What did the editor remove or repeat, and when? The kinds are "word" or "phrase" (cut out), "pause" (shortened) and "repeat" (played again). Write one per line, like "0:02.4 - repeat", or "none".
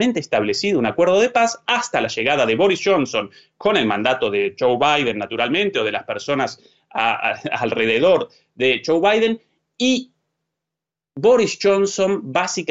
none